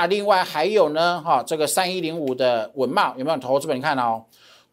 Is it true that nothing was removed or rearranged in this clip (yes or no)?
yes